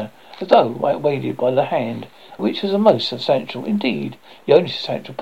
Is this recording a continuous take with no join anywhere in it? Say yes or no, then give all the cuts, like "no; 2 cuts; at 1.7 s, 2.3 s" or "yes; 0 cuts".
no; 1 cut; at 2.4 s